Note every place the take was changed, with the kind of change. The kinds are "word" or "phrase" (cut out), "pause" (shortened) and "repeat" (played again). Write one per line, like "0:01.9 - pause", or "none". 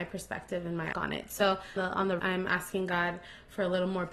0:00.9 - word
0:01.8 - phrase
0:02.2 - phrase

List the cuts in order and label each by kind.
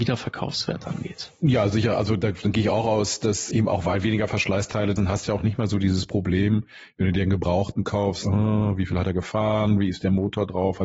0:05.0 - word

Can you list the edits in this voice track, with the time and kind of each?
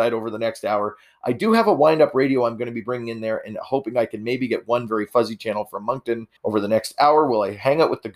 0:06.4 - pause

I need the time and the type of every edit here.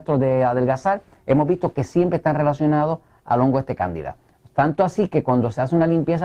none

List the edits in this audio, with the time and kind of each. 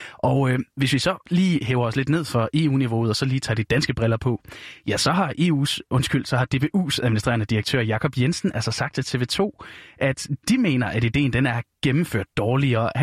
none

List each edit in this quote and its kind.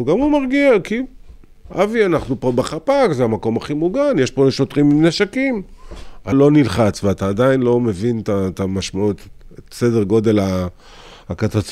0:06.3 - phrase

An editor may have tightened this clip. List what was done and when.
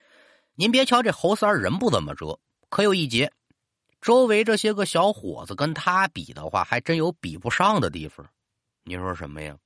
none

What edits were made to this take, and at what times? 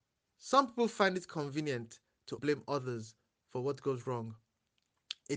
0:02.4 - word

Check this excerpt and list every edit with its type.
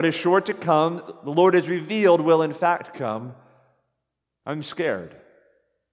none

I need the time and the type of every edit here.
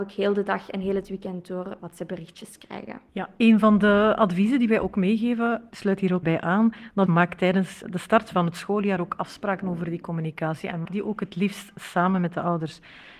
0:03.1 - pause
0:06.2 - word
0:07.1 - word
0:10.8 - word

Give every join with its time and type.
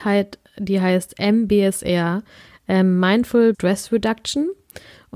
0:03.5 - word

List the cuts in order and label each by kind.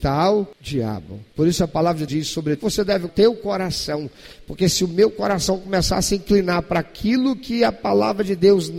0:02.1 - word
0:02.6 - word
0:03.1 - phrase

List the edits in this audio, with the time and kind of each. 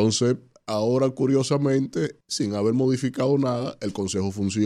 0:02.2 - pause

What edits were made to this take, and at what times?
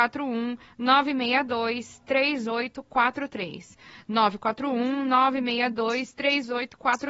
none

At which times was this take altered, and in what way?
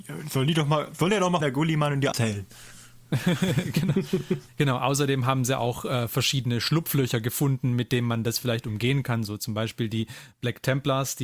0:01.4 - word
0:02.1 - word
0:04.5 - word

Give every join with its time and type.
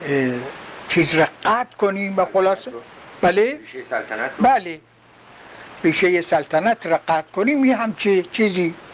none

